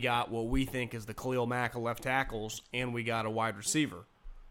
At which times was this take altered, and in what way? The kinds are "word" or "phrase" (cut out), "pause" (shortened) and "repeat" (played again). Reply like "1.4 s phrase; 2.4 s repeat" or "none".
none

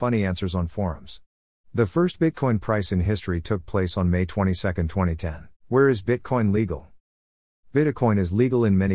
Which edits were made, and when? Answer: 5.6 s pause

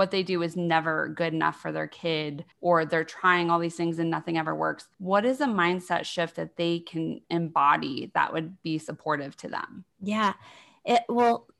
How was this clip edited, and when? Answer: 2.5 s pause; 4.9 s pause; 7.2 s pause; 9.9 s pause

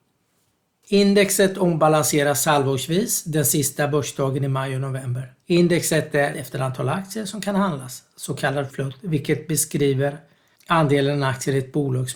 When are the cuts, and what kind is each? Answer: 5.4 s pause; 6.3 s word; 8.7 s word

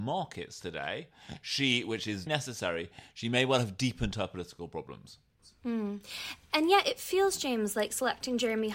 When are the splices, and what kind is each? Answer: 2.3 s word

